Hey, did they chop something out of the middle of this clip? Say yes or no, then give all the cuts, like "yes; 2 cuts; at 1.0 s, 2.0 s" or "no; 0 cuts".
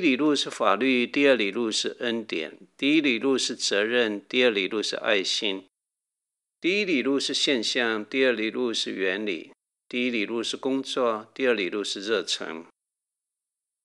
no; 0 cuts